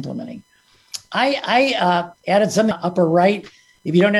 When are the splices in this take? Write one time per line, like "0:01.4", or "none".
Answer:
0:02.2
0:02.7